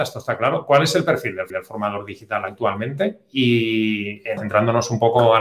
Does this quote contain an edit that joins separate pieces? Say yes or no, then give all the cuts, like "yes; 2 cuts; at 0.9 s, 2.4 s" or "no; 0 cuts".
yes; 2 cuts; at 1.5 s, 4.4 s